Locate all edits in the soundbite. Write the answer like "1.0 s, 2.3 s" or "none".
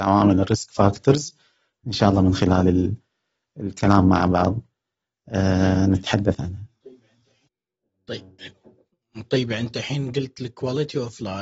none

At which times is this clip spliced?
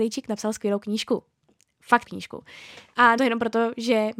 2.0 s, 3.2 s

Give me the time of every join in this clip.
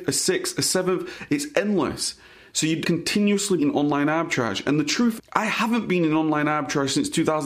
2.8 s, 3.6 s, 5.2 s

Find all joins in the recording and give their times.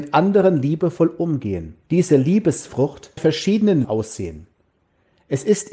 1.8 s, 3.2 s, 3.8 s

